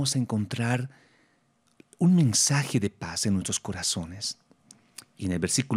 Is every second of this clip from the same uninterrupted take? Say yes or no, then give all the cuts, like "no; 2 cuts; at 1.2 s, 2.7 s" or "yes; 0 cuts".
yes; 0 cuts